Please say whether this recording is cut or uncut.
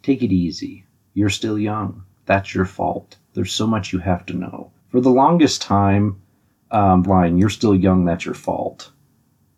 cut